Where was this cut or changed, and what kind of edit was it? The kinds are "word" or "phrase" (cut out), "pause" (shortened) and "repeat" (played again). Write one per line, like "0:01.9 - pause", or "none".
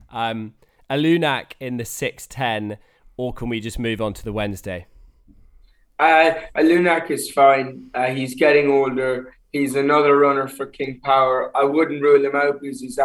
none